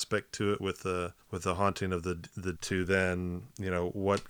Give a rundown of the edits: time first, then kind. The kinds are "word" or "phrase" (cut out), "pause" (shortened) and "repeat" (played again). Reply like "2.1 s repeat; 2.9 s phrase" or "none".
1.2 s pause; 2.6 s word

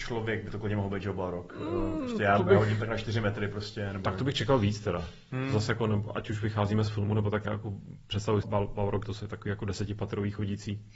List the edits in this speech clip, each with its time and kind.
7.4 s word; 8.4 s word; 9.0 s word

